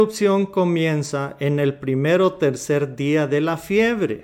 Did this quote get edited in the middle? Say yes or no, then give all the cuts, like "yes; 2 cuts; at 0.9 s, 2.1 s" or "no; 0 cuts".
no; 0 cuts